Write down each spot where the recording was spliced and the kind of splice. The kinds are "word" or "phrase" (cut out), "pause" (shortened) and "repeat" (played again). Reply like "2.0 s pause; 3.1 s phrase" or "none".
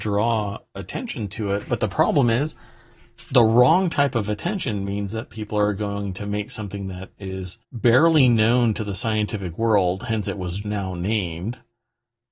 7.6 s pause; 10.6 s word